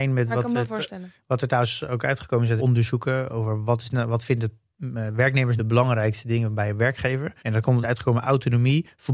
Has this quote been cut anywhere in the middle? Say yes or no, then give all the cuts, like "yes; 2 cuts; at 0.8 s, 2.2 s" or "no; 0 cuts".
yes; 4 cuts; at 2.6 s, 5.6 s, 7.4 s, 7.8 s